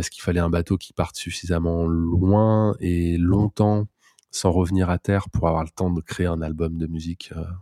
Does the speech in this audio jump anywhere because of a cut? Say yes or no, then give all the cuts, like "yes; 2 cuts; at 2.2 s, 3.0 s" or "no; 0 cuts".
no; 0 cuts